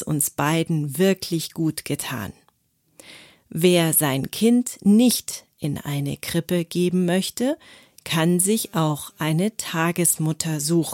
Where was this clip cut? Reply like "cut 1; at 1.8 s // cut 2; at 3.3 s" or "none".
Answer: none

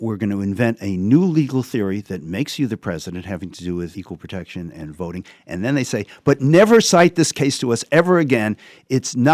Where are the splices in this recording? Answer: cut 1; at 3.9 s

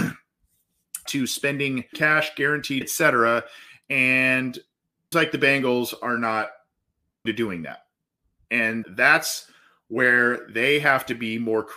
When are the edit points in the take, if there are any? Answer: cut 1; at 1.1 s // cut 2; at 1.9 s // cut 3; at 2.8 s // cut 4; at 5.1 s // cut 5; at 7.3 s // cut 6; at 8.8 s

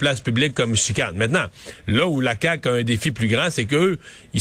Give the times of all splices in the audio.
none

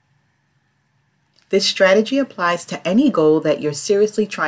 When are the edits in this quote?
none

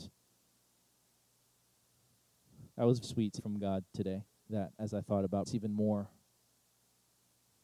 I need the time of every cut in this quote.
cut 1; at 2.7 s // cut 2; at 3.0 s // cut 3; at 3.4 s // cut 4; at 5.5 s

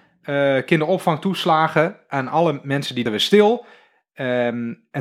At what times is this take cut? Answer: cut 1; at 3.1 s

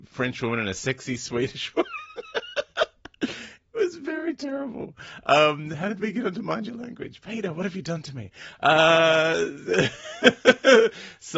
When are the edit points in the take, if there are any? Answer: none

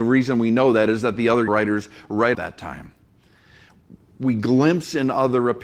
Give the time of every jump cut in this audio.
cut 1; at 1.5 s // cut 2; at 2.3 s

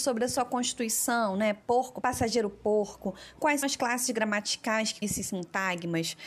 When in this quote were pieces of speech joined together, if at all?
cut 1; at 2.0 s // cut 2; at 3.6 s // cut 3; at 5.0 s

